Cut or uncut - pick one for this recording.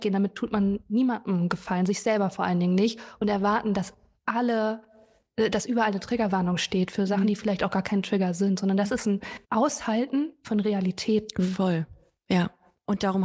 cut